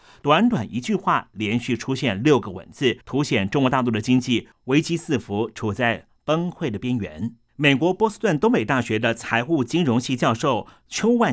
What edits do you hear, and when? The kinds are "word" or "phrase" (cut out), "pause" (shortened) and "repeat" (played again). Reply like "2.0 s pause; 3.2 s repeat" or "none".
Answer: 3.0 s pause